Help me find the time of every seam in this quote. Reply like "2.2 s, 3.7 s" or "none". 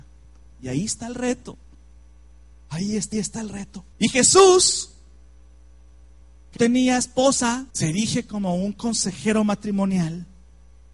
3.1 s, 3.9 s, 6.6 s, 7.7 s